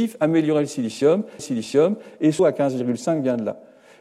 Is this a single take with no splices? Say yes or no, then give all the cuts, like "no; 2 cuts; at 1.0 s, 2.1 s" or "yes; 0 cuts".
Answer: no; 2 cuts; at 1.4 s, 2.4 s